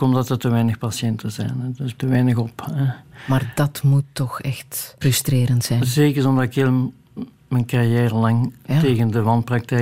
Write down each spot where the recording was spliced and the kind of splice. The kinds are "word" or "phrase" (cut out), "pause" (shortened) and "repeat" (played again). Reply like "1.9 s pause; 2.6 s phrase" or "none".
2.0 s word; 5.0 s word